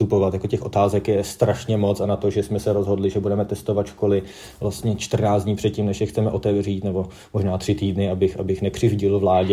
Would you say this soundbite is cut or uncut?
uncut